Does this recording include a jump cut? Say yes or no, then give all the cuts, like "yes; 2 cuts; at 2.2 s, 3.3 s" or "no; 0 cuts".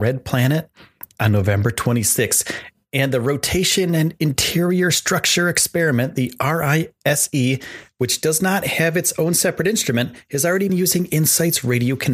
yes; 2 cuts; at 1.1 s, 10.7 s